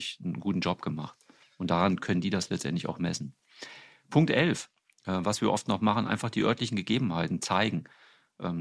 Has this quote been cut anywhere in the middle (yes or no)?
no